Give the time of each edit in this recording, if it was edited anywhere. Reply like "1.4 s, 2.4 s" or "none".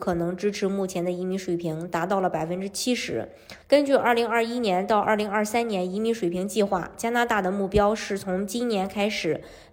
3.6 s